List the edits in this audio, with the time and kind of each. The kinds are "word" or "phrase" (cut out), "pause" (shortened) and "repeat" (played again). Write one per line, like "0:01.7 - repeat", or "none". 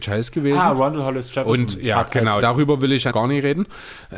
0:02.4 - word
0:03.1 - phrase